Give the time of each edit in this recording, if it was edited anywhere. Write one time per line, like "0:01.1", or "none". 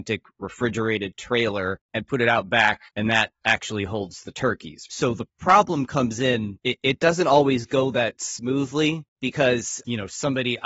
0:01.8
0:02.9
0:09.1